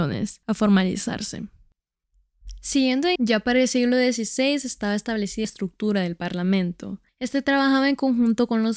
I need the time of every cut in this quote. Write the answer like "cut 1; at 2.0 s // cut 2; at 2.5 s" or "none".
cut 1; at 3.2 s // cut 2; at 5.4 s